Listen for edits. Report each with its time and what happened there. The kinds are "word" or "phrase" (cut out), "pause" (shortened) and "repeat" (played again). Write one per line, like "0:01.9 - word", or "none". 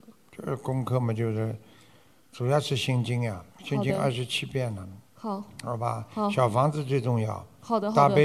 0:03.5 - pause